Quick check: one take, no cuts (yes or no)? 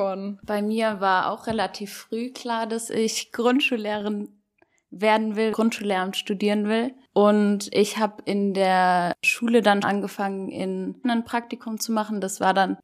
no